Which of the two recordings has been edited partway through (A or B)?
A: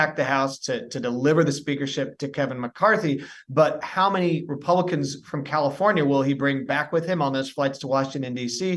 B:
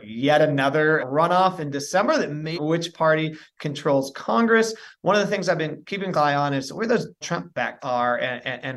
B